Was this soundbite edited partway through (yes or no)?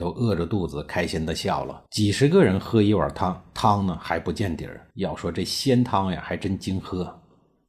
yes